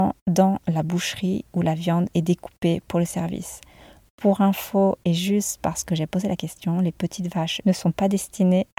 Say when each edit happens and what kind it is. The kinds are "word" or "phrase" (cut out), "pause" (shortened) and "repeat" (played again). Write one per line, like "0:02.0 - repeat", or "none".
0:07.6 - phrase

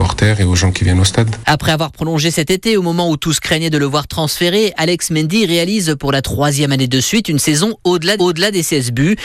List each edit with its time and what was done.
0:08.2 - repeat

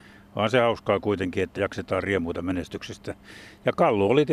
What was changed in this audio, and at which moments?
0:01.6 - word

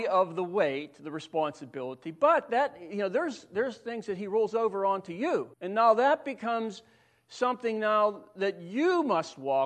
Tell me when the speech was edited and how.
0:05.5 - pause

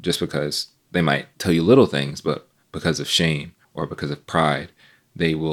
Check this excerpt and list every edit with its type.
0:03.6 - pause

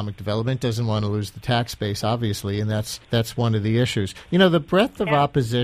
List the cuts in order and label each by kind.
0:03.0 - pause

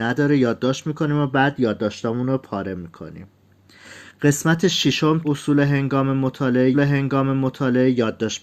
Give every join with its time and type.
0:05.2 - word
0:06.7 - repeat

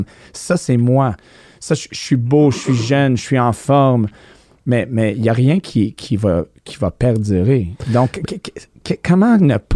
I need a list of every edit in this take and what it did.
none

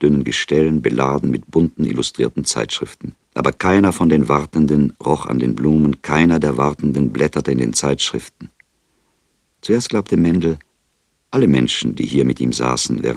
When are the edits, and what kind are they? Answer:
0:03.2 - pause

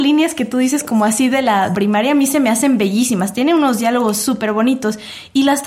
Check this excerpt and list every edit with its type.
0:01.7 - word

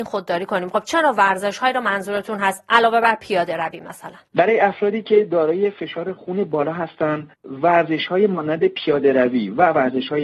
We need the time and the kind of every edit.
0:04.2 - pause
0:07.3 - pause

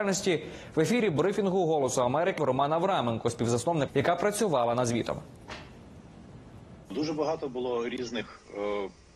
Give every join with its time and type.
0:02.4 - word
0:03.9 - phrase
0:06.8 - pause

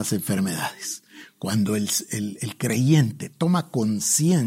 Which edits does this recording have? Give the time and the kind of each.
none

